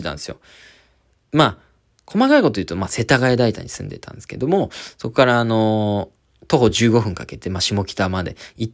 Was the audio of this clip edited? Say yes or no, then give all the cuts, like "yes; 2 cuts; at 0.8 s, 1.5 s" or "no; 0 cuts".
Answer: no; 0 cuts